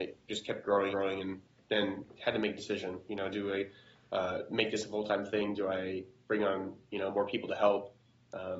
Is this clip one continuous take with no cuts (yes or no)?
no